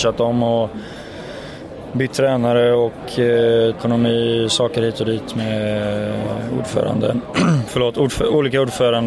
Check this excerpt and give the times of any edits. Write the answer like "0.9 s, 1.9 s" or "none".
3.7 s